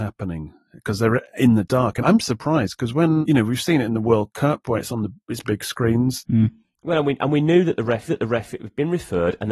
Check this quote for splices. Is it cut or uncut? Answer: cut